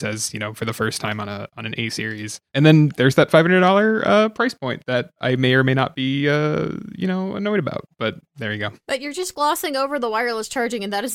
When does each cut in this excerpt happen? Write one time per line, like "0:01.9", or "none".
0:02.5
0:08.8